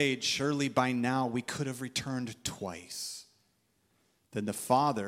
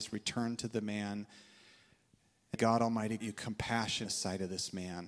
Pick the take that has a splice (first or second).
second